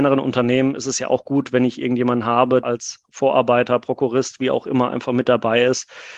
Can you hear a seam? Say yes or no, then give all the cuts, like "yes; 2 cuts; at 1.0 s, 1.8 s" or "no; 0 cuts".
yes; 1 cut; at 2.6 s